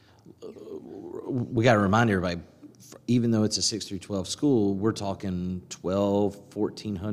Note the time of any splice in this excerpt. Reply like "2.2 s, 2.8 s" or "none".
none